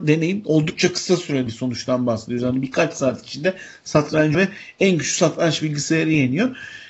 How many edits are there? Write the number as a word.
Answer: two